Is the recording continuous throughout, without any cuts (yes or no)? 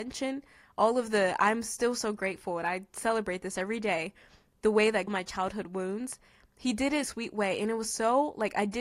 no